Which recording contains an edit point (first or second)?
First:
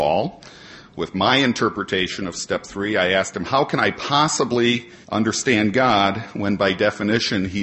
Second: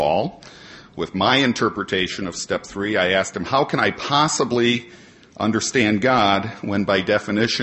first